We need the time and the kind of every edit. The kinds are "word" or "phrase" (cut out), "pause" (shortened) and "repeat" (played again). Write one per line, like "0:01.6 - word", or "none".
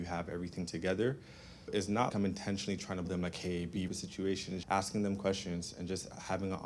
0:01.7 - word
0:02.1 - word
0:03.0 - word
0:03.9 - phrase
0:04.6 - word